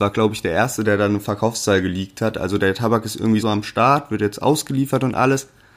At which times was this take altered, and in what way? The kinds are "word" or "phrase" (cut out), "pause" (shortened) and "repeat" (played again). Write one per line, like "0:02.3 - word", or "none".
0:03.4 - phrase